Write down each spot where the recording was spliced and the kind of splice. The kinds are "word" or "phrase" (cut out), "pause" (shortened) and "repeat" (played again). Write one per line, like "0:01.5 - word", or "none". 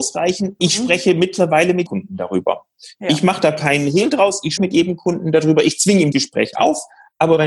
0:01.9 - word
0:04.6 - word
0:06.1 - word
0:06.5 - word